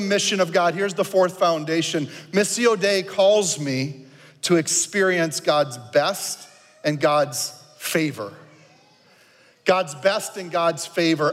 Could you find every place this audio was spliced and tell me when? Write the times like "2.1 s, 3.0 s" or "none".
none